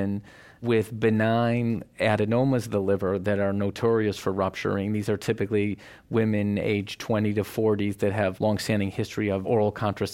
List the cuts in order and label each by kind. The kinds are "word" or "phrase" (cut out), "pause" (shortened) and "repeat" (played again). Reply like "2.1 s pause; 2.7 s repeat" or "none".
8.4 s word